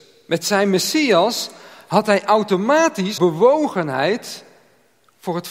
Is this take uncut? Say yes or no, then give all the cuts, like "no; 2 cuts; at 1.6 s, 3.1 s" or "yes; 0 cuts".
no; 1 cut; at 3.2 s